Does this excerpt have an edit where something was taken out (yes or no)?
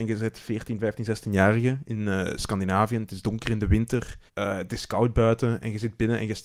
yes